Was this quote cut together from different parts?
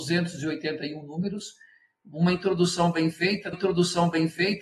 yes; 1 cut; at 3.5 s

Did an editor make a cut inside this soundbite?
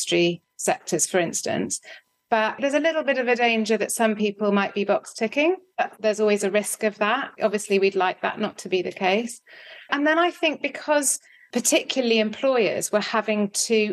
no; 0 cuts

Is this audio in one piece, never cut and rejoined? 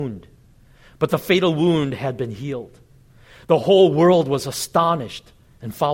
yes; 0 cuts

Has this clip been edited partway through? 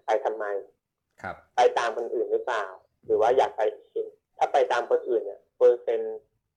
no; 0 cuts

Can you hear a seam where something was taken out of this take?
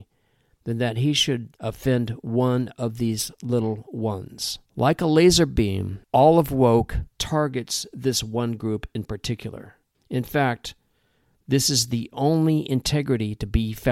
yes; 5 cuts; at 1.5 s, 4.7 s, 6.0 s, 7.1 s, 9.9 s

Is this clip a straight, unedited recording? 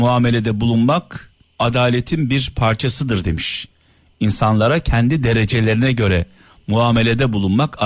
yes; 0 cuts

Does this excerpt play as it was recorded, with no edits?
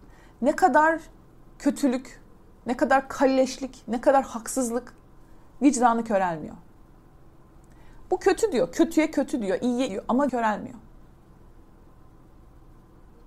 no; 2 cuts; at 9.9 s, 10.3 s

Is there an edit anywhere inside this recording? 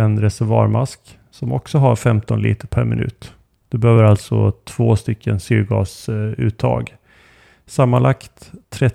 no; 0 cuts

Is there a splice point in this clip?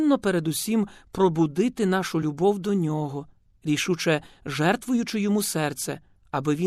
no; 0 cuts

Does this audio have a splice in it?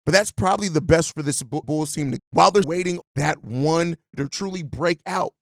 yes; 6 cuts; at 1.1 s, 1.6 s, 2.2 s, 2.6 s, 3.0 s, 4.1 s

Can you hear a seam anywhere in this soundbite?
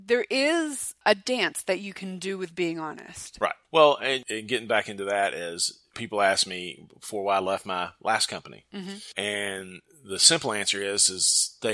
no; 0 cuts

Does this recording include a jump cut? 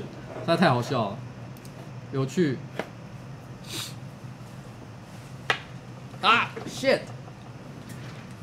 no; 0 cuts

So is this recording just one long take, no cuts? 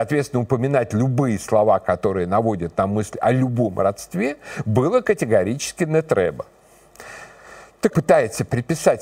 no; 1 cut; at 7.9 s

